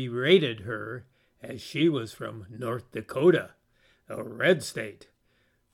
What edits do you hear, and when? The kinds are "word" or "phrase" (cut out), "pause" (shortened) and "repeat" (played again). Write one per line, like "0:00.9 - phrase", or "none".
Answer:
none